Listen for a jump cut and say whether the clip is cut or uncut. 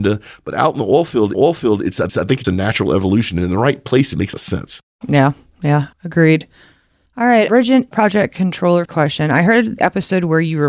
cut